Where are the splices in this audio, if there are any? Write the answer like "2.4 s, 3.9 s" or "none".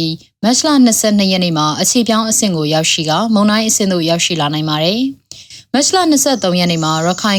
none